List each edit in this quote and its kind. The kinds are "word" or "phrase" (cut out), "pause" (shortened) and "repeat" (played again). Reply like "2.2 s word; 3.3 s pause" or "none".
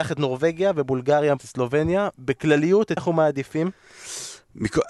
1.4 s word; 2.1 s pause; 3.0 s word